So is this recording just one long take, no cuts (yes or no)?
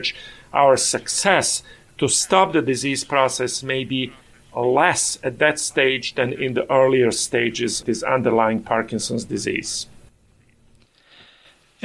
no